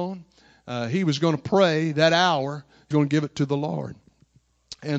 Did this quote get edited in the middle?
yes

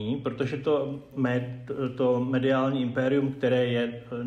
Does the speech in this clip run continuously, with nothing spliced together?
no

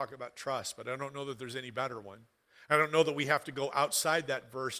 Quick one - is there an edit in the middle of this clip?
no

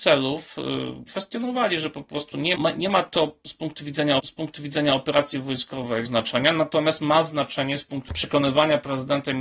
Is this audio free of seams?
no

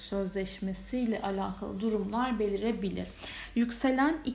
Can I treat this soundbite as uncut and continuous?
yes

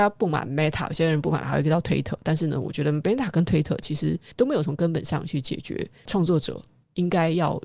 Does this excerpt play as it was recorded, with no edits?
no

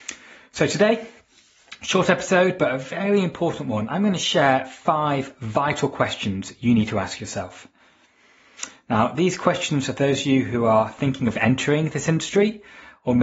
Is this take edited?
no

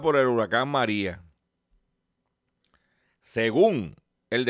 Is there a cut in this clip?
no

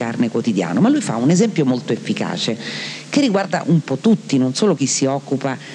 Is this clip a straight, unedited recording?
yes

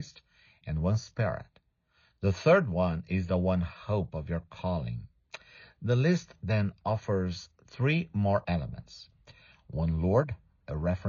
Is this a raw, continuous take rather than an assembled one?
yes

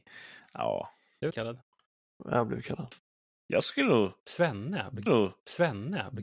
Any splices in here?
yes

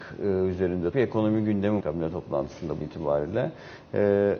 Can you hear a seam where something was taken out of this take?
yes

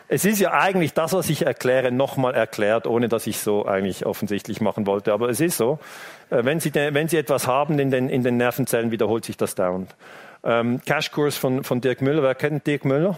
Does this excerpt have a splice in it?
yes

